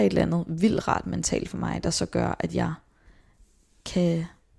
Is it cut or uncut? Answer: uncut